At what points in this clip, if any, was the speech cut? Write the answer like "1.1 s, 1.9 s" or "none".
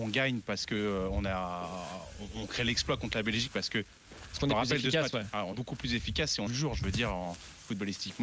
5.5 s, 6.5 s

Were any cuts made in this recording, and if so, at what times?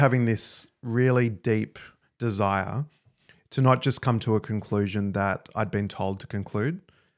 none

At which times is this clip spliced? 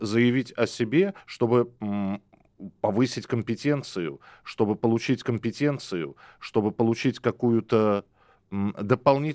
1.2 s, 5.2 s

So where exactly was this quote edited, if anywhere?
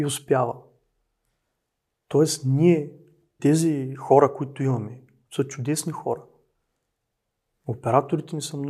3.4 s

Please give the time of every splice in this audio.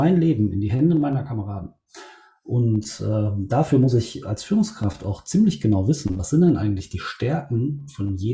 none

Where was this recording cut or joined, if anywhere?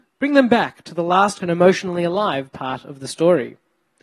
1.4 s

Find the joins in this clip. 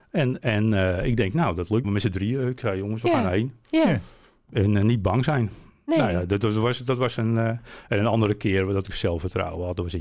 1.8 s

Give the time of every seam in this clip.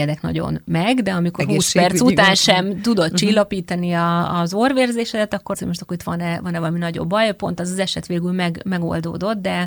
5.5 s

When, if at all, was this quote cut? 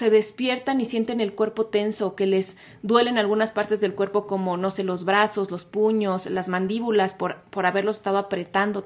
none

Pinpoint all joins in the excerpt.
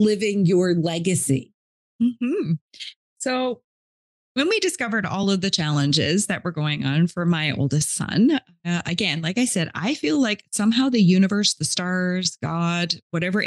none

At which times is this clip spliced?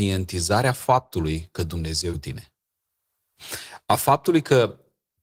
2.1 s

